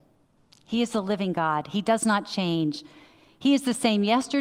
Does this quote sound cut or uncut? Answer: uncut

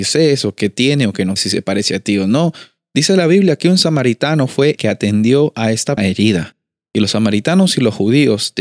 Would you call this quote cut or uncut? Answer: cut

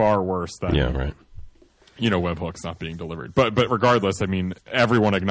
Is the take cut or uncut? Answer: uncut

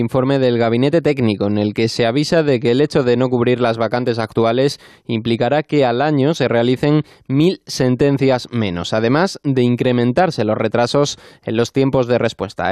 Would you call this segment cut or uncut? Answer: uncut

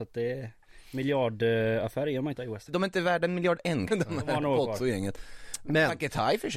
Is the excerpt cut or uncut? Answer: cut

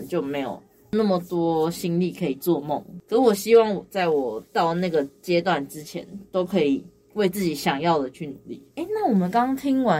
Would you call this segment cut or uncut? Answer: cut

